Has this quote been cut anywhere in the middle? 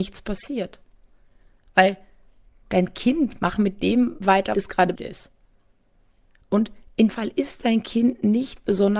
yes; 4 cuts; at 3.6 s, 4.5 s, 4.9 s, 7.1 s

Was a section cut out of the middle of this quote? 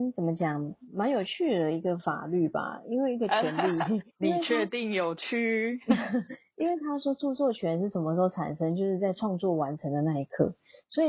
yes; 1 cut; at 4.1 s

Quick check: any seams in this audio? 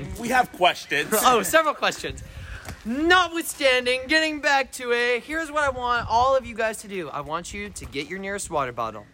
no; 0 cuts

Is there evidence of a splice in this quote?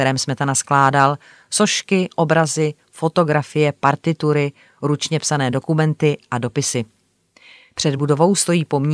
no; 0 cuts

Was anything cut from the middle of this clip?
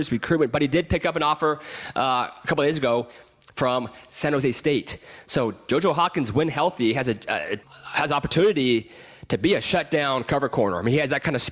yes; 1 cut; at 7.6 s

